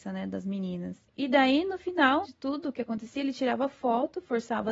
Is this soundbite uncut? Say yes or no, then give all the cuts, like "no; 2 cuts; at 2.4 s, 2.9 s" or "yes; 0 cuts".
no; 1 cut; at 2.2 s